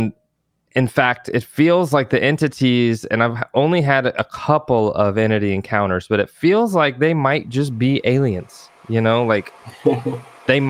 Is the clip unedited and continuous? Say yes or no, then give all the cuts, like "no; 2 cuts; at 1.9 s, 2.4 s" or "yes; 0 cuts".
yes; 0 cuts